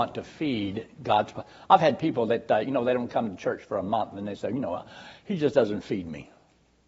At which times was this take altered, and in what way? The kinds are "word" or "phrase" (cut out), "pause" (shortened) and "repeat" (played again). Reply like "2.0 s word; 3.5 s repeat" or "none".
none